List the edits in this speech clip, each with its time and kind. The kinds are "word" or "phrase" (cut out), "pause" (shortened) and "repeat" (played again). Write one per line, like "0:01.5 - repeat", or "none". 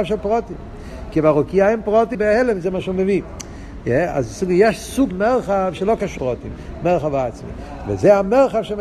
0:02.1 - phrase
0:05.1 - word
0:06.2 - word